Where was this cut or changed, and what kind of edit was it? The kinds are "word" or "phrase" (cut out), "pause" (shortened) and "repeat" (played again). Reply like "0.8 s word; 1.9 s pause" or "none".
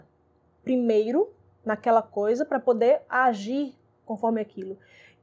none

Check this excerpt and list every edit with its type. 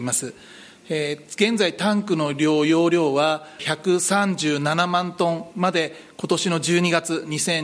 3.6 s phrase

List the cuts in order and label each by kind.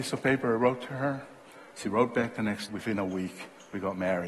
2.7 s word

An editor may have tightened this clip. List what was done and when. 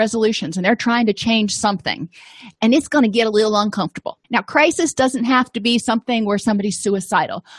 4.2 s pause

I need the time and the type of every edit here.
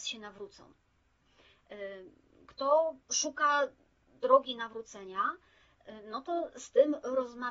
3.0 s pause

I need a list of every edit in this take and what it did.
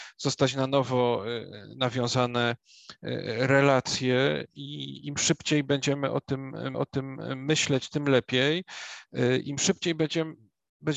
6.7 s repeat

